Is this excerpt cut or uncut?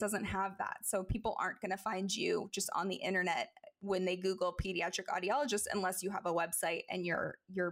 uncut